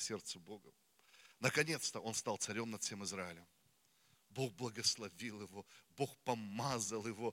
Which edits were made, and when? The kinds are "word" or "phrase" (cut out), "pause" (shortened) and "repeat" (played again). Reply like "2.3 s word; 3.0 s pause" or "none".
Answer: none